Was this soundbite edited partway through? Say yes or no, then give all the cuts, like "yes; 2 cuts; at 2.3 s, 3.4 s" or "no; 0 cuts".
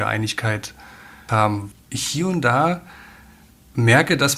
yes; 2 cuts; at 1.3 s, 1.7 s